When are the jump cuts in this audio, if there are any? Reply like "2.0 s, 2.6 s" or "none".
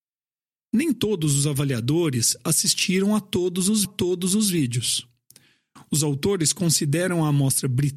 3.8 s